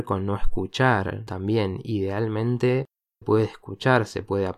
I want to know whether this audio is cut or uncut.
cut